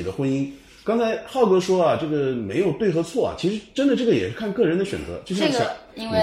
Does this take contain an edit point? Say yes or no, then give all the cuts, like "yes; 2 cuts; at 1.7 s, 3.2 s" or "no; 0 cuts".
no; 0 cuts